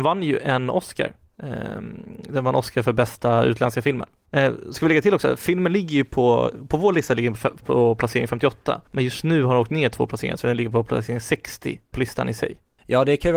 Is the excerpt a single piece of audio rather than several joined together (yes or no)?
no